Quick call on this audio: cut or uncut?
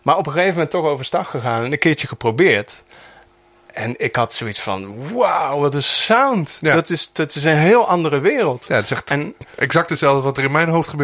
uncut